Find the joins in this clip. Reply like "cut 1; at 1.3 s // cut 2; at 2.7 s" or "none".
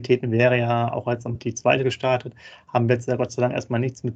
cut 1; at 1.3 s // cut 2; at 1.8 s

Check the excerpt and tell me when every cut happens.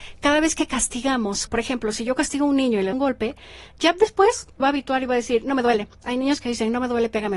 cut 1; at 1.5 s // cut 2; at 2.9 s // cut 3; at 4.6 s

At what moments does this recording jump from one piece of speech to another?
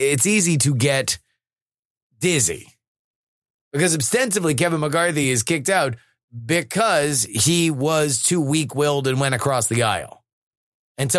none

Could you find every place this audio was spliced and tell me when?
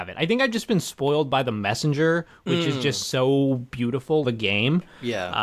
cut 1; at 4.2 s

